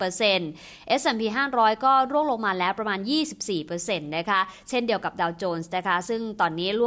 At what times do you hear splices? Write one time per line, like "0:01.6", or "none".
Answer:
none